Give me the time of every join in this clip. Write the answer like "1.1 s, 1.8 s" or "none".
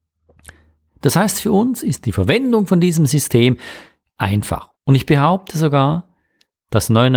4.8 s